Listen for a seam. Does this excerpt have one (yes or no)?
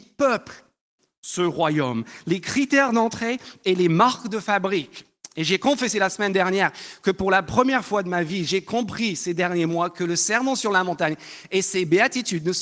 no